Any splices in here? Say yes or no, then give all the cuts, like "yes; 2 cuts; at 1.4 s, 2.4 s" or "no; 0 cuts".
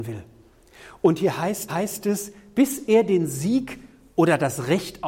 yes; 1 cut; at 1.7 s